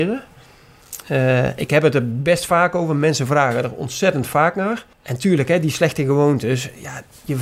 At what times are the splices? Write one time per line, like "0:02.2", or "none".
0:04.9